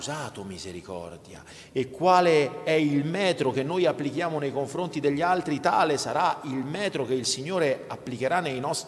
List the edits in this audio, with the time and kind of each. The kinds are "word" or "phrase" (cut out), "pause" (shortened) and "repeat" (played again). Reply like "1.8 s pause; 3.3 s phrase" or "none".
none

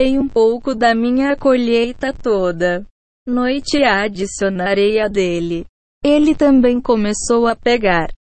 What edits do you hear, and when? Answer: none

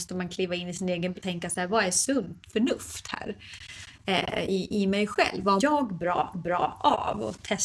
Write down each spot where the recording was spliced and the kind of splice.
1.1 s word; 5.6 s word; 6.3 s repeat

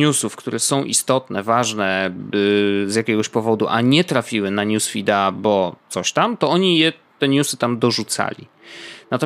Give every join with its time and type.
5.8 s pause

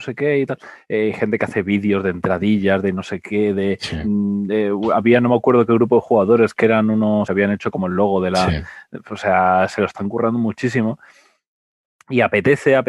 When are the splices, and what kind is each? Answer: 7.3 s word

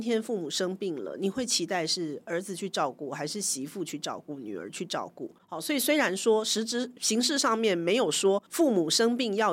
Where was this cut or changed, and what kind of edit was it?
5.4 s pause; 8.5 s pause

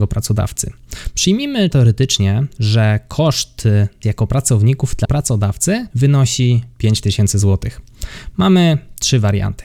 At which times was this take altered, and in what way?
1.7 s word; 4.0 s word; 5.0 s word; 5.9 s pause

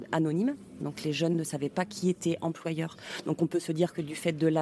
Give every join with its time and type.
none

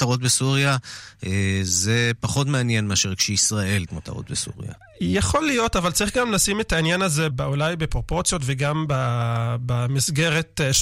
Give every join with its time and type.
3.9 s word; 7.3 s word

